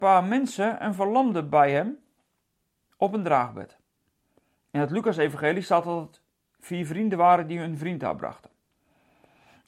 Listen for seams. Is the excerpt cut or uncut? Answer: uncut